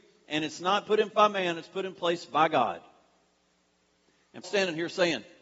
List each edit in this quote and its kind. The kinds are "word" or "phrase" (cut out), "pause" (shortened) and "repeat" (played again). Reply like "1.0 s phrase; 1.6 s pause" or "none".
1.1 s word; 4.4 s word